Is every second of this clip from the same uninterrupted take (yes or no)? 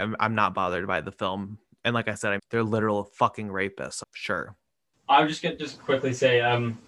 no